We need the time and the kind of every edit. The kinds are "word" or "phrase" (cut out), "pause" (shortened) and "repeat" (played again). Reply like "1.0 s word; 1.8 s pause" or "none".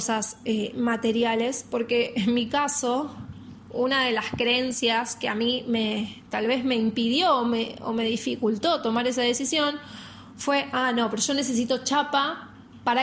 none